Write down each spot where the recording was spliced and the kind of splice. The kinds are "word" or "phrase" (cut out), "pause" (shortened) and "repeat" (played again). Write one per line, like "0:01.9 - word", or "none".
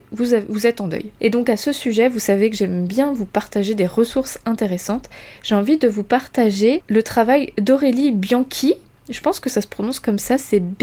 none